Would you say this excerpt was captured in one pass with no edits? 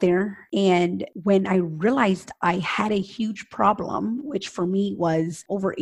yes; 0 cuts

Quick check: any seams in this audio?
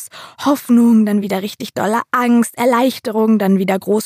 no; 0 cuts

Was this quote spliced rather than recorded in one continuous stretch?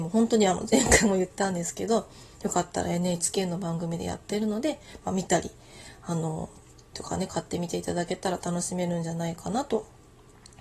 yes; 1 cut; at 6.9 s

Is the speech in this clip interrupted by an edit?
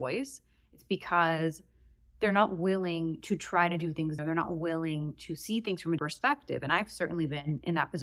yes; 2 cuts; at 4.2 s, 6.0 s

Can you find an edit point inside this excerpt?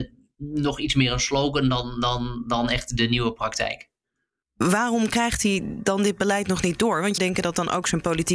yes; 1 cut; at 7.2 s

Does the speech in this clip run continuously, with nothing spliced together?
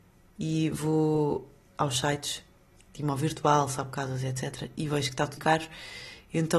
no; 1 cut; at 5.4 s

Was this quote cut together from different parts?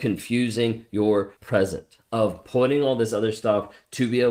yes; 1 cut; at 1.4 s

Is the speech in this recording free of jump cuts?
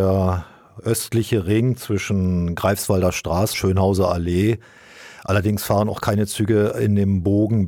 no; 1 cut; at 3.5 s

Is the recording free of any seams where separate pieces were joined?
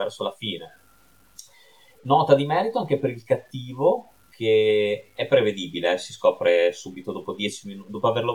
yes; 0 cuts

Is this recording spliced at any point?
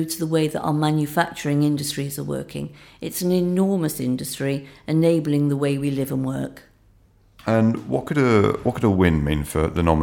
no; 0 cuts

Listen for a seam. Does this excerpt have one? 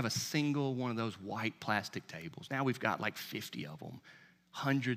no; 0 cuts

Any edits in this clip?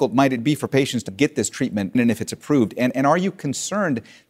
yes; 2 cuts; at 1.1 s, 1.9 s

